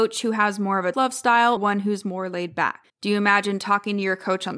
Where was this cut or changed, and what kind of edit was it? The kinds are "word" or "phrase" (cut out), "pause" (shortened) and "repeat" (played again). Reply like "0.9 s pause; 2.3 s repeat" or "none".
0.9 s word; 1.6 s word; 2.9 s pause